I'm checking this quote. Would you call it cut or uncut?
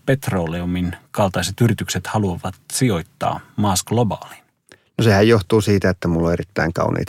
cut